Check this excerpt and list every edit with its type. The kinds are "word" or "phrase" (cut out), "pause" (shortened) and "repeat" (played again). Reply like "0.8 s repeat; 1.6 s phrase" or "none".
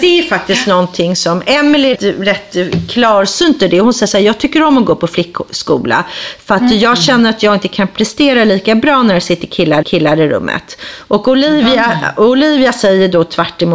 2.0 s word; 9.8 s repeat